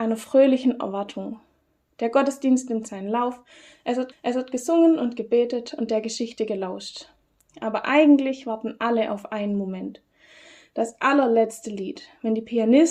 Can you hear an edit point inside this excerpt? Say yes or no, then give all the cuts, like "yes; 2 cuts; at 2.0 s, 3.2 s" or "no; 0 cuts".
yes; 1 cut; at 4.1 s